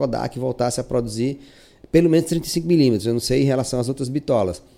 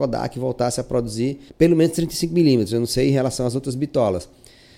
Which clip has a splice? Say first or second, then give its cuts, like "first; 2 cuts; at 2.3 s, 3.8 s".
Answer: second; 1 cut; at 1.5 s